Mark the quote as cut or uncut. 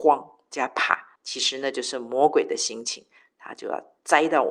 cut